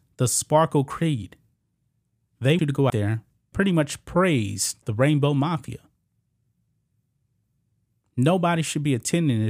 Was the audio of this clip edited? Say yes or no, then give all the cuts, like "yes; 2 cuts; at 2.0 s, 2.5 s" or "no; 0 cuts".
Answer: yes; 3 cuts; at 2.6 s, 2.9 s, 3.5 s